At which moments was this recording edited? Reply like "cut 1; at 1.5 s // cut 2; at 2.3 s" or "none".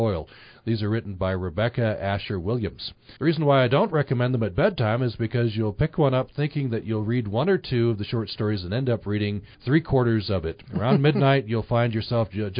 cut 1; at 3.2 s // cut 2; at 9.5 s // cut 3; at 10.7 s